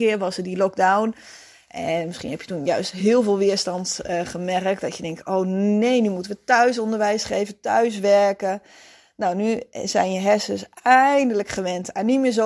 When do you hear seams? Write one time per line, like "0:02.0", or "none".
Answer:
none